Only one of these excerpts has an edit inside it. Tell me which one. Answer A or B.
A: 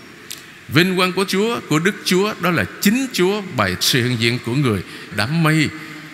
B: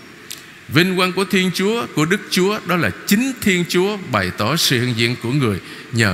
A